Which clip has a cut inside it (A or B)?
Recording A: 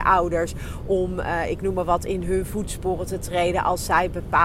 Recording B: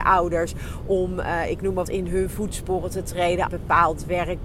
B